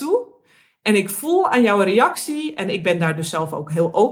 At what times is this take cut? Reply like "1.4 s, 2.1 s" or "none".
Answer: none